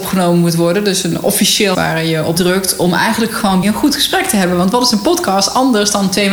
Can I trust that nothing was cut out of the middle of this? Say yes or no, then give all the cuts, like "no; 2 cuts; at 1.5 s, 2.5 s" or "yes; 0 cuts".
no; 3 cuts; at 1.7 s, 2.4 s, 3.6 s